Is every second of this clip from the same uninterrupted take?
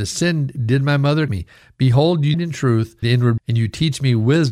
no; 4 cuts; at 1.3 s, 2.3 s, 3.0 s, 3.4 s

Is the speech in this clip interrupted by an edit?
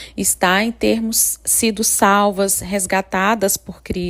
no; 0 cuts

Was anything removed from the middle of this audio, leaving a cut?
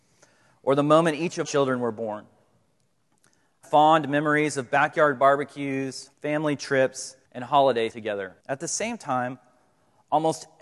yes; 6 cuts; at 1.4 s, 3.6 s, 6.1 s, 7.2 s, 7.9 s, 8.4 s

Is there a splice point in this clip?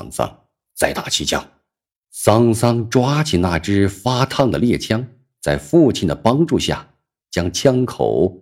no; 0 cuts

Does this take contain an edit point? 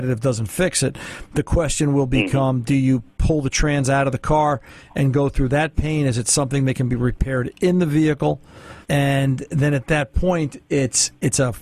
yes; 1 cut; at 8.8 s

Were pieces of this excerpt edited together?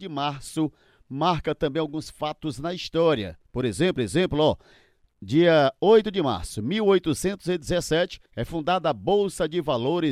yes; 2 cuts; at 4.0 s, 8.3 s

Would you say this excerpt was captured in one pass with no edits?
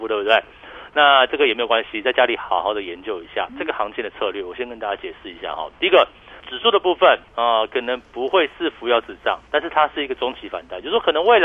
no; 3 cuts; at 3.5 s, 6.4 s, 7.3 s

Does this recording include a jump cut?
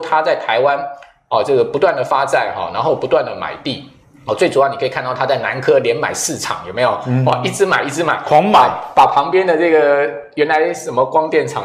yes; 1 cut; at 4.0 s

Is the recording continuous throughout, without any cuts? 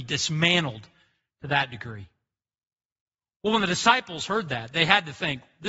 yes; 0 cuts

